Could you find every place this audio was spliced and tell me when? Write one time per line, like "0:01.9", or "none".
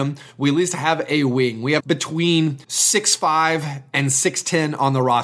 0:01.8
0:02.6